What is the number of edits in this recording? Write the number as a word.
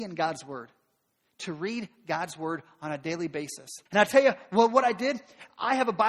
one